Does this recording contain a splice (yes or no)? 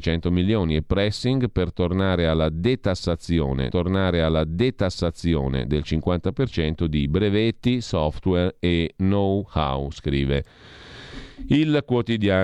yes